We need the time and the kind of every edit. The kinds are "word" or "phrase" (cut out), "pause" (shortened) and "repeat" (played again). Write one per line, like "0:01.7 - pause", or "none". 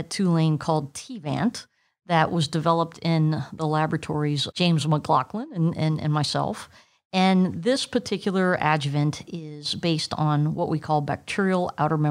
0:04.5 - word